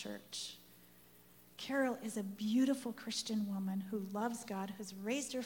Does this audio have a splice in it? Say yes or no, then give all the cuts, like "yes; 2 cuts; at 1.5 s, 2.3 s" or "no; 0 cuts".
no; 0 cuts